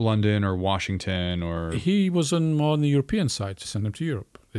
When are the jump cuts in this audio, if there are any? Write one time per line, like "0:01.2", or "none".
0:03.6